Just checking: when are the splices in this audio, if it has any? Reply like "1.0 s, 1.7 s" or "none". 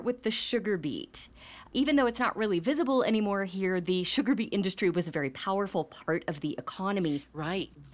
none